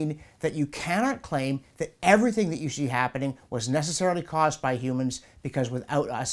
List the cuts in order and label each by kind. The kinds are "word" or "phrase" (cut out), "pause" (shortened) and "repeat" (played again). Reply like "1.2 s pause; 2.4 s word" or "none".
none